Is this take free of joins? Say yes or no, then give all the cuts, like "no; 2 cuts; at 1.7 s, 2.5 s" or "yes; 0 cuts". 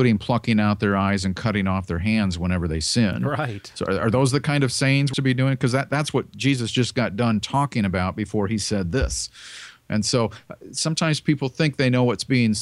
no; 1 cut; at 5.1 s